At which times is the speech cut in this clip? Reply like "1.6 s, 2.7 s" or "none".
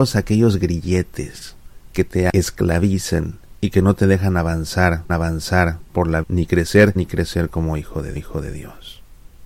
5.1 s, 6.2 s, 7.0 s, 8.2 s